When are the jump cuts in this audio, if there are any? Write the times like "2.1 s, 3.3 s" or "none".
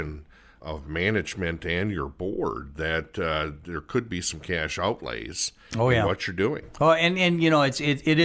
none